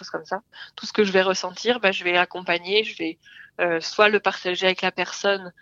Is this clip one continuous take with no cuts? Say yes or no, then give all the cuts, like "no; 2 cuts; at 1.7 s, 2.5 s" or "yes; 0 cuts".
yes; 0 cuts